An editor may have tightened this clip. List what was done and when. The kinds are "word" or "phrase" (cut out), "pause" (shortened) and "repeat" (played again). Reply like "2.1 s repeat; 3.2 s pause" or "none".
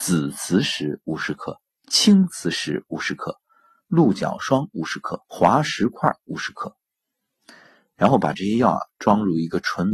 5.2 s pause

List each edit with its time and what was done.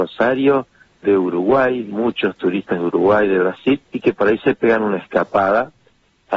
3.9 s pause

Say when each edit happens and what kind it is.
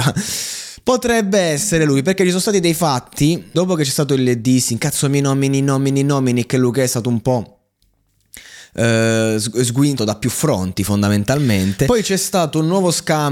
3.5 s phrase; 10.0 s phrase

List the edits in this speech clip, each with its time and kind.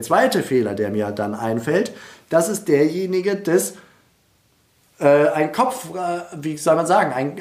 none

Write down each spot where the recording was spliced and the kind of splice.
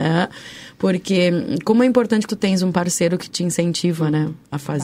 2.3 s word

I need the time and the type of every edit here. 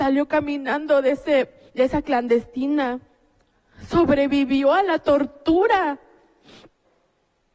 1.7 s pause; 2.0 s word

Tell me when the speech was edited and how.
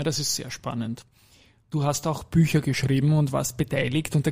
none

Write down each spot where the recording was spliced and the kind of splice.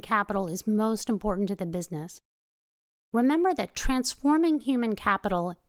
none

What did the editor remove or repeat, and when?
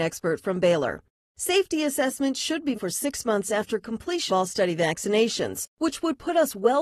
2.7 s word; 4.3 s word

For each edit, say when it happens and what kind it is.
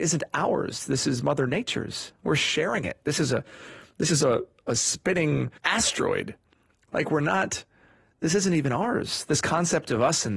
5.6 s pause

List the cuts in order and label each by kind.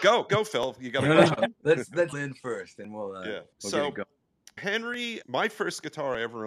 1.6 s pause; 2.1 s word; 2.8 s word; 3.5 s pause; 4.6 s word; 5.2 s word

